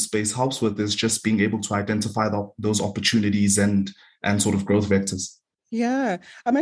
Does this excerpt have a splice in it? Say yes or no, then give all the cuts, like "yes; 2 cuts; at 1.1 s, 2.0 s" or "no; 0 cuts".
no; 0 cuts